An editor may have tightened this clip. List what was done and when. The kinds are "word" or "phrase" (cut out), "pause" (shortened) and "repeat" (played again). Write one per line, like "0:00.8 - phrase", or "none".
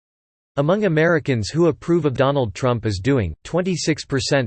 0:02.2 - phrase